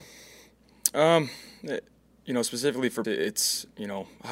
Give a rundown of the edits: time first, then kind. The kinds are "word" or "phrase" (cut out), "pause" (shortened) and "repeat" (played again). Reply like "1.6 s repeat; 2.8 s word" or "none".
3.0 s word